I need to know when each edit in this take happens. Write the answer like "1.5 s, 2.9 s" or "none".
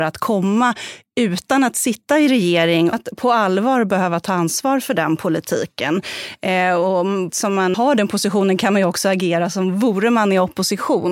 2.9 s, 7.3 s, 7.7 s